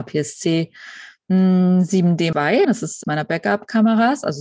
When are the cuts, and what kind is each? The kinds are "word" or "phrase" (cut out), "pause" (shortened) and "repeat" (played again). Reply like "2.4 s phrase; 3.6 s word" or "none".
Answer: 2.3 s word; 2.6 s word; 3.0 s word